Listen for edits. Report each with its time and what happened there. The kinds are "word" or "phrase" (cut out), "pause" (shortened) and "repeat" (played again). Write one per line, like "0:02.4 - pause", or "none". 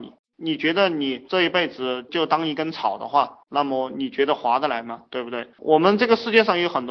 0:03.4 - pause
0:05.5 - pause